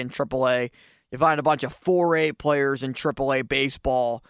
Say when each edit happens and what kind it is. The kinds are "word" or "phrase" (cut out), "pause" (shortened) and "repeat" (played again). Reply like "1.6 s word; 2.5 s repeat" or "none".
none